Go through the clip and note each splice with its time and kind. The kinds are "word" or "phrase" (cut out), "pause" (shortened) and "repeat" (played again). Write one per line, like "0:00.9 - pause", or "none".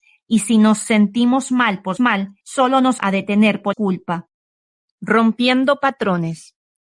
0:02.0 - word
0:02.4 - pause
0:03.0 - word
0:03.7 - phrase